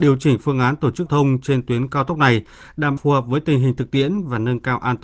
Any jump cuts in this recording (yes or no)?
yes